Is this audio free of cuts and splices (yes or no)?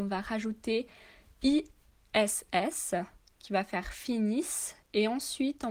yes